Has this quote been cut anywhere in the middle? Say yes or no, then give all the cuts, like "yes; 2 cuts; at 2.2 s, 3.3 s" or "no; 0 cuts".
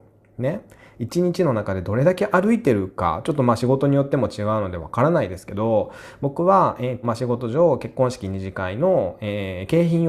yes; 1 cut; at 7.0 s